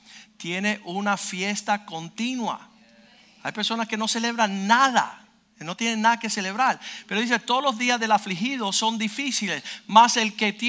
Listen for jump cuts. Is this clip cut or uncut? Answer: uncut